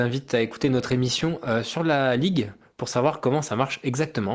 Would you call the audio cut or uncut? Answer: uncut